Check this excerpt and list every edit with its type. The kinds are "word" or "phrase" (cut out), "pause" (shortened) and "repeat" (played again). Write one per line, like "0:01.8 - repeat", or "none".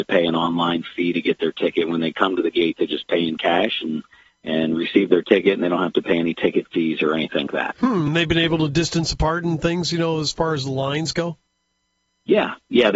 0:07.5 - word